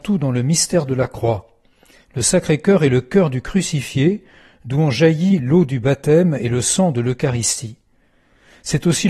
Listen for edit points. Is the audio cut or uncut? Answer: uncut